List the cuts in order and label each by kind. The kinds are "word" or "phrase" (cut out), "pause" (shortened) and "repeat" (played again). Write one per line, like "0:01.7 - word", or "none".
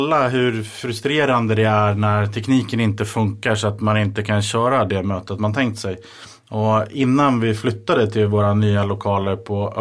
none